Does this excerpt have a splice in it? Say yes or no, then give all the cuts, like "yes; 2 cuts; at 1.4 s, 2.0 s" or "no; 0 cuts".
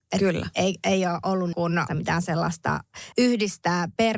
yes; 3 cuts; at 1.5 s, 1.9 s, 3.1 s